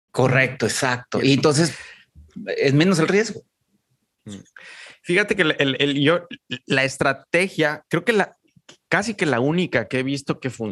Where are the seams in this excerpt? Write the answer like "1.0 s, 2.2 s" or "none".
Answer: none